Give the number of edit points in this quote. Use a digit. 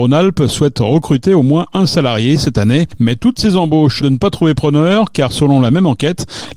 1